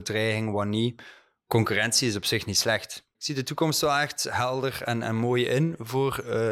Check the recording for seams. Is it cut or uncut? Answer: uncut